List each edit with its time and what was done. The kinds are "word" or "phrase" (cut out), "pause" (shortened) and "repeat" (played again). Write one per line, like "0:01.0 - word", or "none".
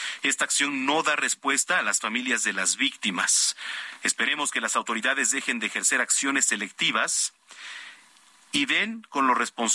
none

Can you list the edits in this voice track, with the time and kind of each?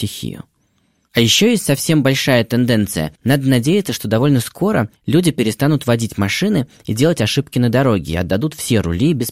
0:03.2 - pause

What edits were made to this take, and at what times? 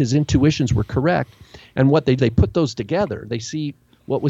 0:02.2 - word

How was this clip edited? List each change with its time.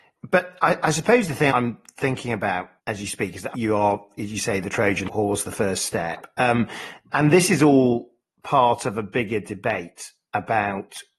0:01.5 - word
0:02.8 - word
0:03.5 - word
0:07.1 - word

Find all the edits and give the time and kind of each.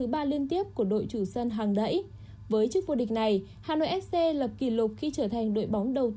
none

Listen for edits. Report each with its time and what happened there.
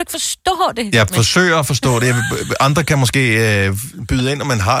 none

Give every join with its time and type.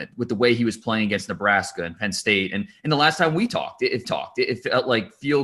0:04.0 - repeat

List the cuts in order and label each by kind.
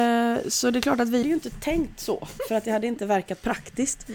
0:01.2 - word

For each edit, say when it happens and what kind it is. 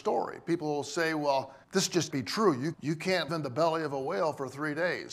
0:01.6 - pause
0:02.1 - word
0:02.7 - word
0:03.3 - word

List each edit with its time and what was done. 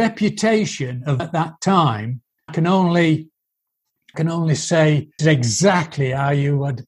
0:01.2 - word
0:02.5 - word
0:04.1 - word
0:05.2 - word

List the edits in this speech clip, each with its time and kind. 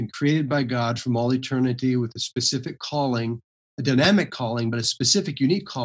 none

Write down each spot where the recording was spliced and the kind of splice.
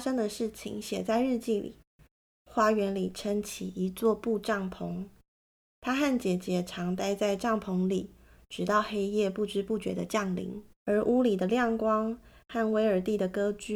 0:10.7 - pause

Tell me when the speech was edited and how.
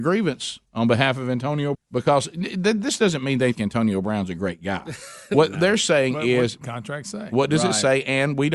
0:01.7 - word
0:03.5 - word
0:06.6 - phrase

